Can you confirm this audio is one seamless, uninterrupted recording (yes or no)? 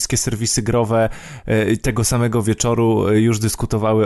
yes